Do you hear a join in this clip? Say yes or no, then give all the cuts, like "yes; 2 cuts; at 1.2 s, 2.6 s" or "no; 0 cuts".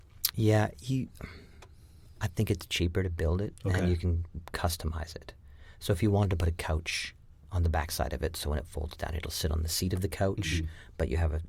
no; 0 cuts